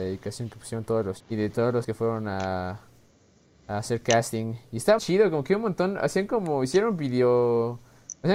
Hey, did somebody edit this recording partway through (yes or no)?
yes